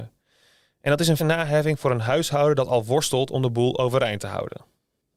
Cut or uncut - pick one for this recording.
cut